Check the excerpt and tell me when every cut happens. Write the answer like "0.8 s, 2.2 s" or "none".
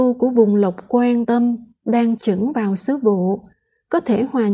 1.2 s, 2.2 s